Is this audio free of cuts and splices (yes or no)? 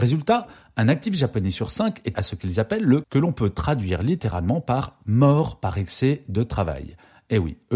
no